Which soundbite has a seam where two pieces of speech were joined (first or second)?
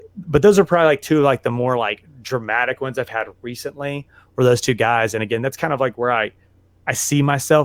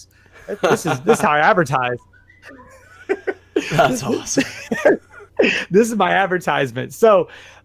second